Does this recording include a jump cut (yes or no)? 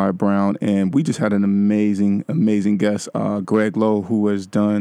no